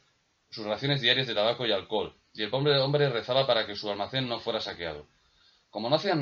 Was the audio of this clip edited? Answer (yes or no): no